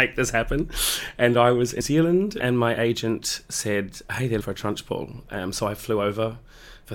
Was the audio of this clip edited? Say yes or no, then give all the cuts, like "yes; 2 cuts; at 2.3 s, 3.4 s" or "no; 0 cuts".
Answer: yes; 2 cuts; at 1.8 s, 4.4 s